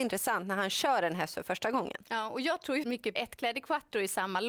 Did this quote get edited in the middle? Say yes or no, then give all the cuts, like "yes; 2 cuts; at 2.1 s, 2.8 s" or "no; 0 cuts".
yes; 2 cuts; at 2.8 s, 3.2 s